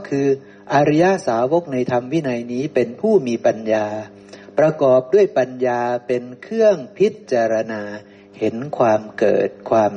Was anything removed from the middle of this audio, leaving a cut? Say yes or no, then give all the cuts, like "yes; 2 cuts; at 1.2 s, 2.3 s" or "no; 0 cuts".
no; 0 cuts